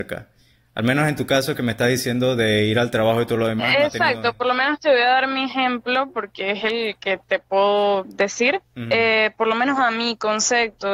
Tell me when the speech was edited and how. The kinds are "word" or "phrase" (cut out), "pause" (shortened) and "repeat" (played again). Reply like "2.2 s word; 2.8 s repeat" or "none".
8.7 s pause